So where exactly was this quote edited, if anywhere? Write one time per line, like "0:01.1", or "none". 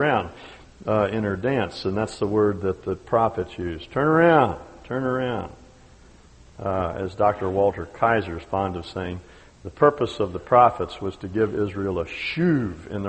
none